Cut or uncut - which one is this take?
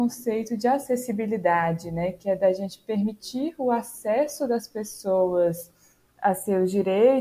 uncut